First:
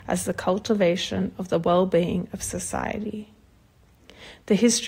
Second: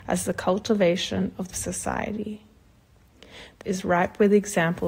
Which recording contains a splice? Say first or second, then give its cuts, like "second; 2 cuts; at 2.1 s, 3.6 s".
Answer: second; 2 cuts; at 1.5 s, 3.6 s